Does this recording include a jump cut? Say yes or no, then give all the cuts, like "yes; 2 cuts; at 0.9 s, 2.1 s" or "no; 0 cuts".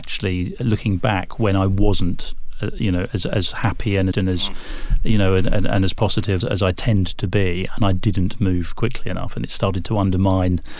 yes; 2 cuts; at 4.1 s, 6.4 s